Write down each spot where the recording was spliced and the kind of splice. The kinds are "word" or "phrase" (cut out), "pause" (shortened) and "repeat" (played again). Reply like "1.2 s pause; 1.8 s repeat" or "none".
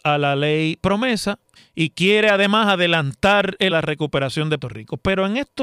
1.6 s pause; 3.7 s phrase; 4.6 s word